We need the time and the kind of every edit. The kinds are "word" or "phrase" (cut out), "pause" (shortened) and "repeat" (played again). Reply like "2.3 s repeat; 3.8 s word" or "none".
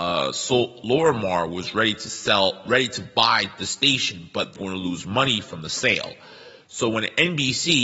4.6 s word

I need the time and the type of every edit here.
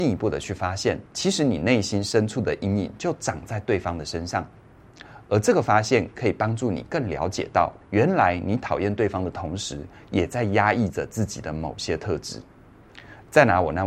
1.1 s pause; 7.8 s pause

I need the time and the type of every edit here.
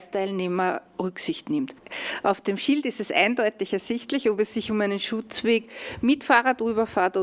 none

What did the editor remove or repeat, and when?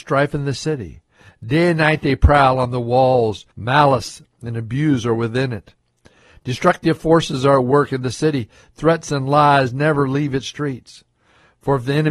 3.5 s pause

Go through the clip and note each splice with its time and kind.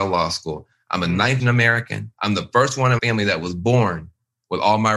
1.4 s word; 2.1 s pause; 3.0 s word

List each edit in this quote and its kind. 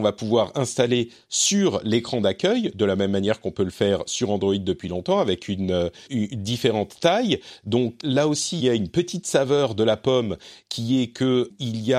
6.1 s word; 8.0 s word; 8.6 s word

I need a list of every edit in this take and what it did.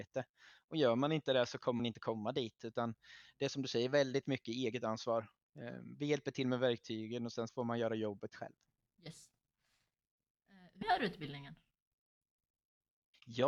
1.8 s word; 7.5 s word; 10.8 s word

